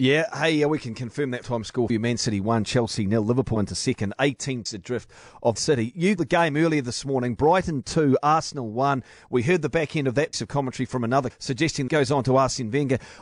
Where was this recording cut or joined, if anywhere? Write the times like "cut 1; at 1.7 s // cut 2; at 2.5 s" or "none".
cut 1; at 1.4 s // cut 2; at 1.9 s // cut 3; at 3.6 s // cut 4; at 4.7 s // cut 5; at 5.6 s // cut 6; at 6.2 s // cut 7; at 10.3 s // cut 8; at 11.3 s // cut 9; at 11.9 s